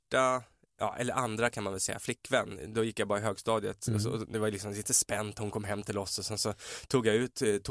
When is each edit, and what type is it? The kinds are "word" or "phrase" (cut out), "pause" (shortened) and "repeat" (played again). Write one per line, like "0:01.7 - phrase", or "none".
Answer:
none